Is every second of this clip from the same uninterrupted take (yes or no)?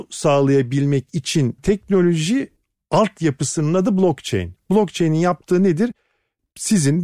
no